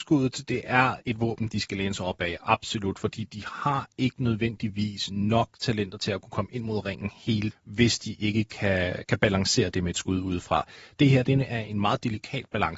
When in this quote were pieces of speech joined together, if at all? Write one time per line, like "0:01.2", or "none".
0:01.0
0:07.5